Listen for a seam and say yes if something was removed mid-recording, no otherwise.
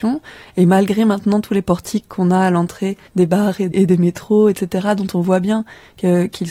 yes